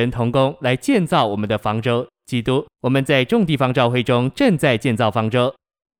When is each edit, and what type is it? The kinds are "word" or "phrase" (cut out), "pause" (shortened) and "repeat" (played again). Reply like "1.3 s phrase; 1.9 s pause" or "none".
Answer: 2.7 s pause